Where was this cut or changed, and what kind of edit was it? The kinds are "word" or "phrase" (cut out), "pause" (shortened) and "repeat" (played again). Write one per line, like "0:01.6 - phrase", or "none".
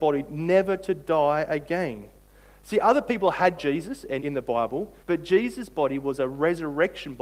0:03.6 - phrase
0:04.2 - word
0:05.0 - pause